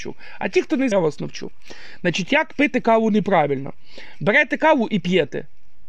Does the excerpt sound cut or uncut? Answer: cut